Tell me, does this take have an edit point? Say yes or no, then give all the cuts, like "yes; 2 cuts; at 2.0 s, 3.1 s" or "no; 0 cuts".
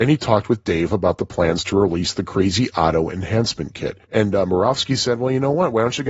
yes; 1 cut; at 4.0 s